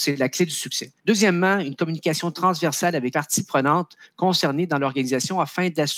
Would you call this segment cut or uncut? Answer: cut